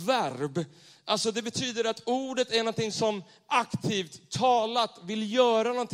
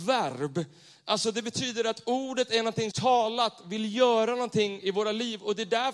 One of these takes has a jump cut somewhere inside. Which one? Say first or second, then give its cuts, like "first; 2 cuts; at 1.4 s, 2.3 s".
second; 1 cut; at 2.9 s